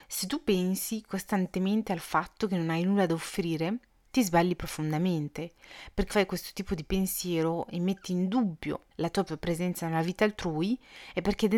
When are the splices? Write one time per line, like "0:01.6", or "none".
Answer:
0:06.1
0:08.9
0:09.3